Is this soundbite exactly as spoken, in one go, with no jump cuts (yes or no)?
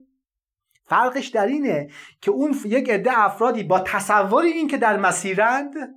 yes